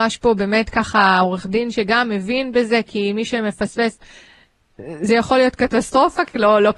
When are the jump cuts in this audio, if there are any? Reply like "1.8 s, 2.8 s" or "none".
none